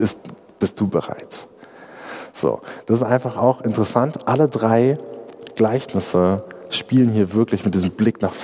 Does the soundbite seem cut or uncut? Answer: uncut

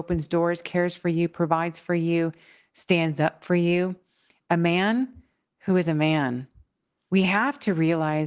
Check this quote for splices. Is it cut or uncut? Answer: uncut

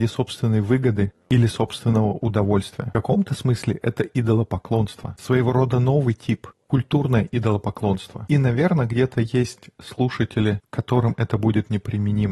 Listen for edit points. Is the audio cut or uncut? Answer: uncut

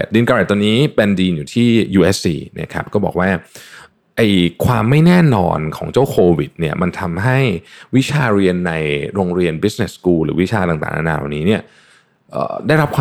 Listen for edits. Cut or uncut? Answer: uncut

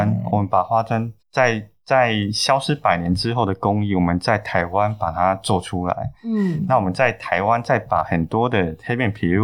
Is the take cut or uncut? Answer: cut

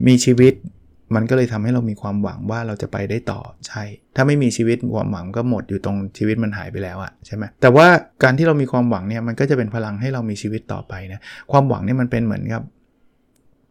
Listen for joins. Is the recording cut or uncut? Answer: cut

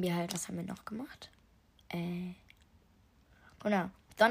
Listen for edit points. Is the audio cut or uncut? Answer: uncut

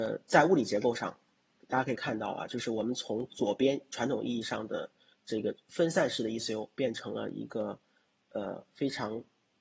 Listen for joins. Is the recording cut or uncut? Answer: uncut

